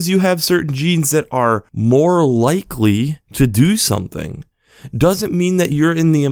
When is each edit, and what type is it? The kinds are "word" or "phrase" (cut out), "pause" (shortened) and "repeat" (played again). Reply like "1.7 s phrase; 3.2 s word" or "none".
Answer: 3.2 s pause